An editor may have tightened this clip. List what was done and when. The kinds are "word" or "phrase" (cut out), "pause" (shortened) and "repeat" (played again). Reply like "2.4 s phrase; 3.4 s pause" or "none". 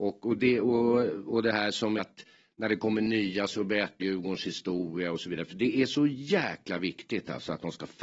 2.0 s word; 4.0 s word